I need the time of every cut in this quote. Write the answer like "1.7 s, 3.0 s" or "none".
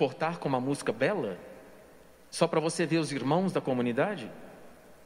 none